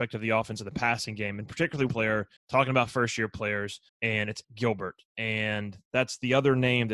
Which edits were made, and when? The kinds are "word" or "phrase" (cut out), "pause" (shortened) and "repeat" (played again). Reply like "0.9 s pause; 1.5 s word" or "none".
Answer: 1.9 s word; 2.4 s pause; 3.9 s pause; 4.4 s word